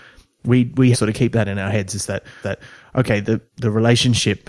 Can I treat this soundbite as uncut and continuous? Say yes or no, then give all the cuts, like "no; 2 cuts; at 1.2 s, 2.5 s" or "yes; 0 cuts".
no; 3 cuts; at 0.9 s, 2.4 s, 3.5 s